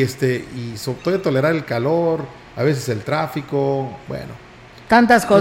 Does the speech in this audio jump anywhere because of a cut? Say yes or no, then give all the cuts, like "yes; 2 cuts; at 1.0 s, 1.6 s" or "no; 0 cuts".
no; 0 cuts